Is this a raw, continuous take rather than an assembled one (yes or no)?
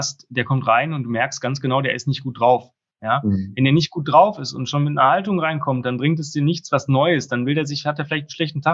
yes